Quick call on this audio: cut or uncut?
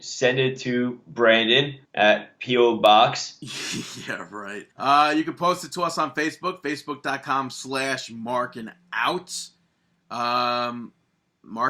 cut